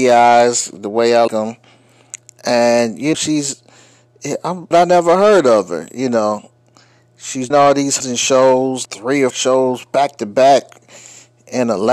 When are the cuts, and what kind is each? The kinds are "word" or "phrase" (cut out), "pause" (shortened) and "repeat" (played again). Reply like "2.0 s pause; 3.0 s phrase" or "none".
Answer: 1.3 s word; 3.1 s word; 4.7 s word; 7.5 s word; 8.0 s word; 8.9 s word; 9.3 s word